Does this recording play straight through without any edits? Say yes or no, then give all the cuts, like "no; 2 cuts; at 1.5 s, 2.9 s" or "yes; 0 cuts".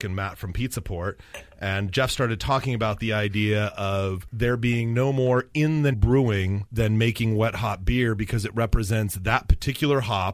no; 2 cuts; at 1.9 s, 5.9 s